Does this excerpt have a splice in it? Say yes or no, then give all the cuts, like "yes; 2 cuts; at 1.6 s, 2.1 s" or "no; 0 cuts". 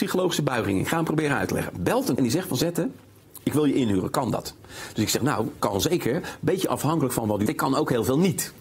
yes; 3 cuts; at 2.2 s, 5.6 s, 7.5 s